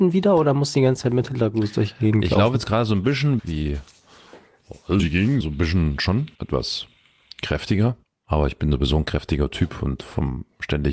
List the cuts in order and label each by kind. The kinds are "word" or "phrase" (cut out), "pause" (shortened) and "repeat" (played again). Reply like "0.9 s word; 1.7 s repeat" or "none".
3.4 s word; 5.0 s word; 5.4 s word; 6.3 s pause; 8.0 s pause